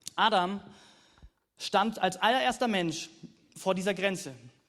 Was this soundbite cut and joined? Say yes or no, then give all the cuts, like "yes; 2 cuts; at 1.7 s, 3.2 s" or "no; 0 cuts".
no; 0 cuts